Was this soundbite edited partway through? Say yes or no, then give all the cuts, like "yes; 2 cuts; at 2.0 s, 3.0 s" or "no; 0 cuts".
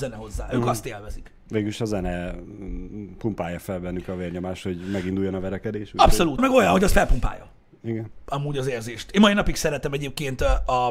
yes; 2 cuts; at 1.4 s, 6.4 s